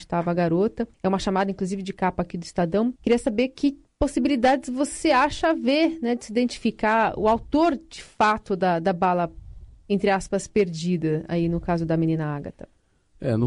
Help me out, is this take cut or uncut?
cut